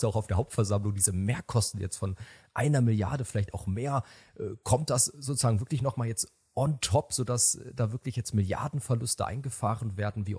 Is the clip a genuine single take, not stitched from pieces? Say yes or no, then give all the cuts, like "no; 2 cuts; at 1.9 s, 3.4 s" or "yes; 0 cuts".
yes; 0 cuts